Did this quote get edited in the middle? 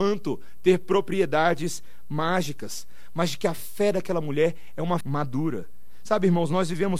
yes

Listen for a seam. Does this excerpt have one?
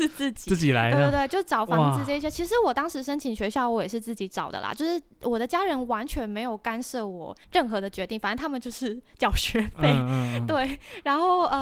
yes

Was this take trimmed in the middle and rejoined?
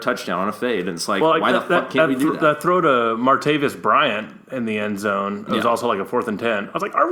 no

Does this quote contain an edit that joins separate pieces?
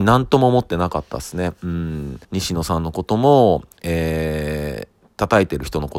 yes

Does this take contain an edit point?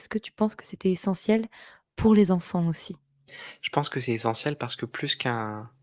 no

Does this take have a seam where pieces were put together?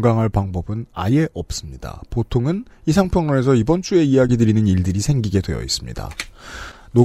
no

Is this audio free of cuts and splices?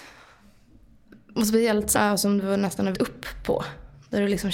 no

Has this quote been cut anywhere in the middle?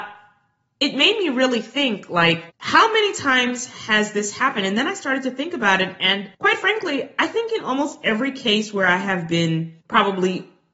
yes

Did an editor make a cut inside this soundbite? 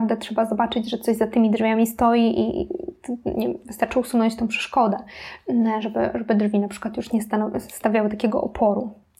no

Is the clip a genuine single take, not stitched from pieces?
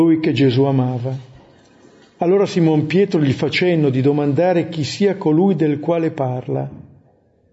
yes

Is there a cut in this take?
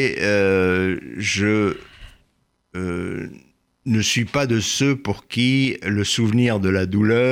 no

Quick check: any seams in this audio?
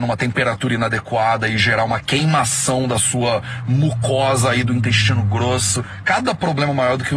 no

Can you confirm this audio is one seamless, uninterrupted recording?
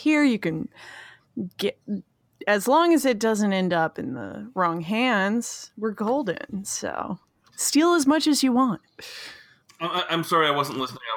yes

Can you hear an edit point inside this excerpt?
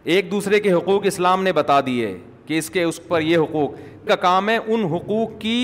yes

